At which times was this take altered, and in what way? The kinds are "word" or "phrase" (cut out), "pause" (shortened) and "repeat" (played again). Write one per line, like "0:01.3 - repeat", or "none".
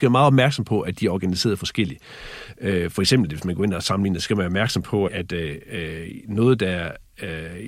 0:04.2 - word
0:05.1 - word